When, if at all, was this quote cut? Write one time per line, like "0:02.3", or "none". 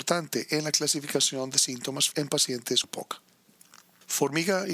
0:02.1
0:02.8

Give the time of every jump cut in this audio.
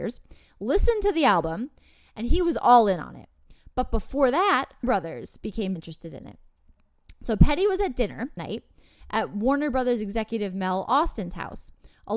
0:04.8
0:05.8
0:08.4

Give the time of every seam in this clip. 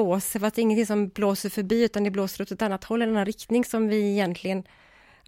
none

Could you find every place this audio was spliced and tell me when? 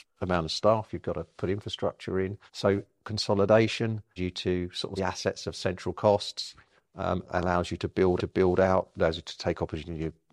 0:02.5
0:04.2
0:05.0
0:08.2

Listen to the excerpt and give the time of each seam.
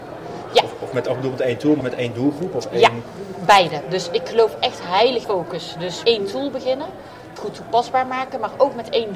0:01.8
0:05.2
0:06.0
0:07.4

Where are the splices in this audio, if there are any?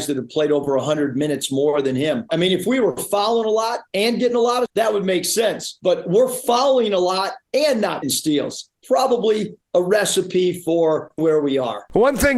0:04.7
0:07.4
0:08.0
0:11.2

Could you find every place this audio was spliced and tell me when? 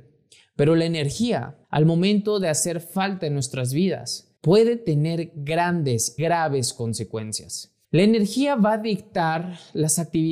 0:01.6
0:04.4
0:06.2
0:07.8

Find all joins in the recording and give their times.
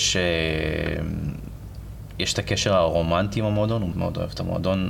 0:03.9

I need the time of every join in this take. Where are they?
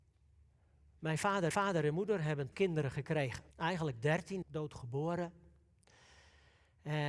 0:01.5
0:02.5
0:03.5
0:04.4

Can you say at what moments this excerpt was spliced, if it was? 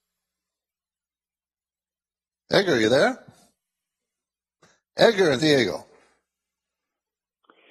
0:05.4

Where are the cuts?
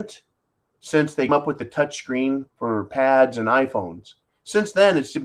0:01.3
0:02.5

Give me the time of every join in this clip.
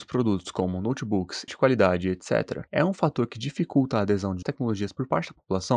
0:01.5
0:02.7
0:04.4

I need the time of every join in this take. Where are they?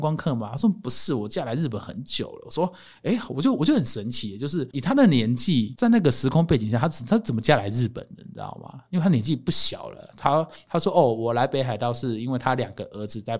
none

